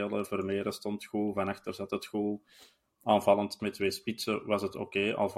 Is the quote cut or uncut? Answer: cut